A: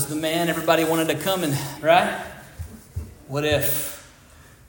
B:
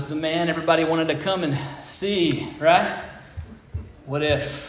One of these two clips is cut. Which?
A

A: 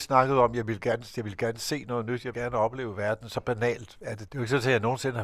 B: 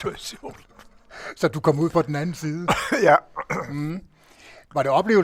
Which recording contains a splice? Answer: A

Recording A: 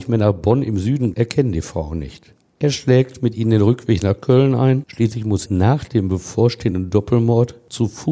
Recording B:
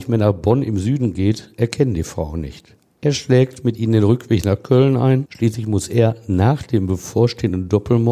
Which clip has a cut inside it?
A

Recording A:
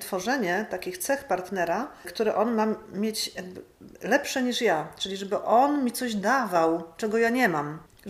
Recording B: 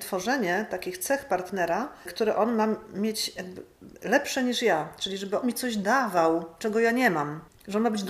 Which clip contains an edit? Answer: B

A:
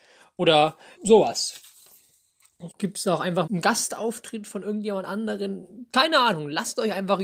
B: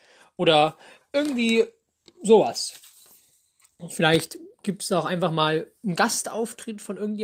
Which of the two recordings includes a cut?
A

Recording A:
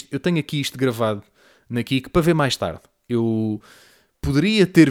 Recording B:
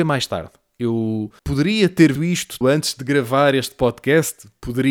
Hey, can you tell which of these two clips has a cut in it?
B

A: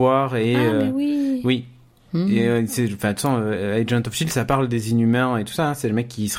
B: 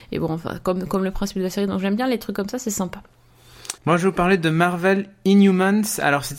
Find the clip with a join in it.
B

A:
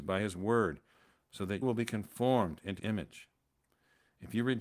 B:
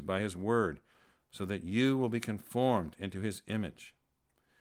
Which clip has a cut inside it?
A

